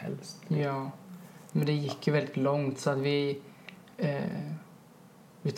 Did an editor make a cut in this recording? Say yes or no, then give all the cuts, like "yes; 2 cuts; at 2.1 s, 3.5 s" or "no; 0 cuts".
no; 0 cuts